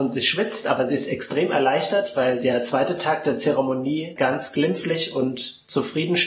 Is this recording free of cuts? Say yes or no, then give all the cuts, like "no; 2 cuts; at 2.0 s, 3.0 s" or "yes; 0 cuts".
yes; 0 cuts